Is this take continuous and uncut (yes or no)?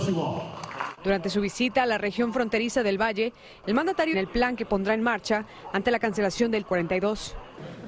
no